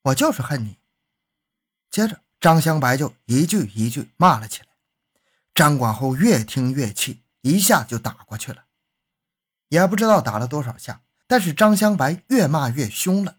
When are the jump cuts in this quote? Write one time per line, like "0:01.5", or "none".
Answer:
none